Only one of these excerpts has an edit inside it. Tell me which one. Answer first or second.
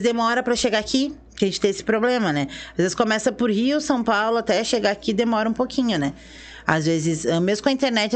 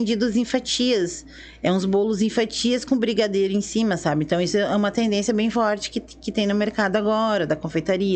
first